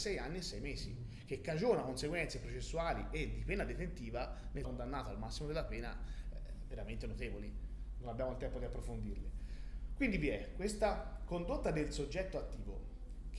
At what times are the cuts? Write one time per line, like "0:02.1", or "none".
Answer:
0:04.6